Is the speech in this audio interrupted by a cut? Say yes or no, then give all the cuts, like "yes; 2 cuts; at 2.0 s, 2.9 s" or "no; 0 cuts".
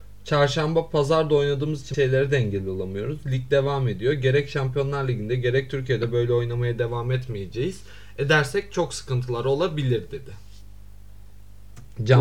yes; 1 cut; at 1.9 s